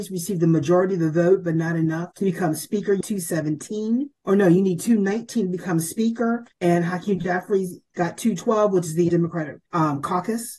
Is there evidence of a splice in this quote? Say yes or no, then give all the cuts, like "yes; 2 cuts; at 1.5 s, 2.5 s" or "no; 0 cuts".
yes; 6 cuts; at 2.1 s, 3.0 s, 4.2 s, 6.5 s, 9.1 s, 9.7 s